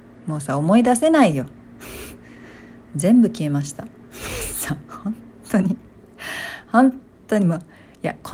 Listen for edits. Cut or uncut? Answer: uncut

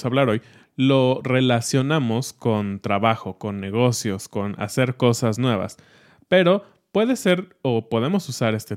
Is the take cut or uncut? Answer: uncut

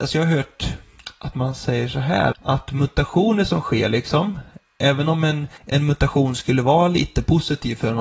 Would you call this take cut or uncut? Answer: cut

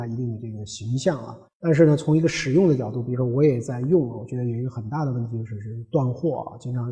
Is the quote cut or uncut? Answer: cut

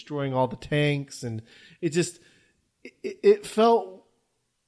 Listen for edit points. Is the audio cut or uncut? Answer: uncut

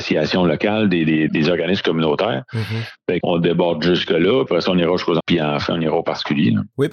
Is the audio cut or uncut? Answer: cut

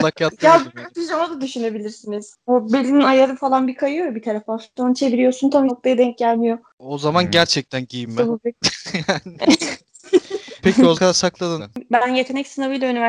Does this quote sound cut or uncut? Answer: cut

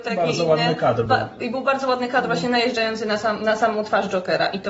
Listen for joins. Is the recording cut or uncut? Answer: uncut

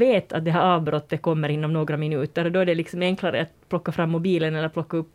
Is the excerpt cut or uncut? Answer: uncut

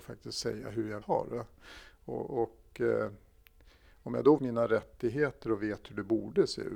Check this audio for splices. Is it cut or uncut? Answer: cut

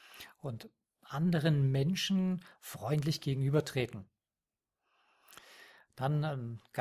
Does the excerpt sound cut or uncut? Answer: uncut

